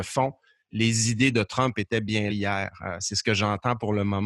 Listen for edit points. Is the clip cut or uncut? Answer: cut